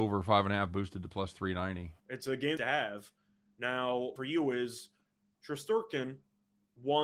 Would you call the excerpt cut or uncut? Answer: cut